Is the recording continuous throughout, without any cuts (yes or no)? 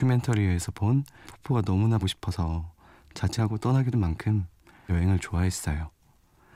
no